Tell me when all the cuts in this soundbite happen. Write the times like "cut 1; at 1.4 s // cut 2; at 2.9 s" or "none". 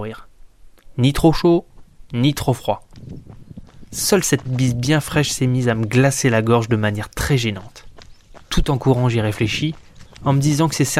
cut 1; at 4.5 s // cut 2; at 8.4 s